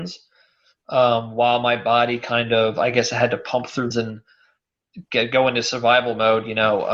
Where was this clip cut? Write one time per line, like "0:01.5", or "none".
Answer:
0:03.9